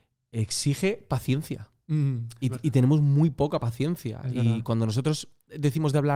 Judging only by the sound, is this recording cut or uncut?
uncut